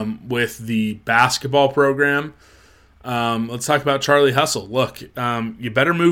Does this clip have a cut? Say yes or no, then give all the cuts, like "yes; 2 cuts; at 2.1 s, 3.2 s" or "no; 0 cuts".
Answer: no; 0 cuts